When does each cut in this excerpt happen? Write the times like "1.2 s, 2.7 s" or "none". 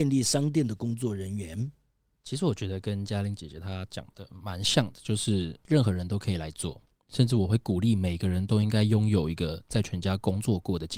none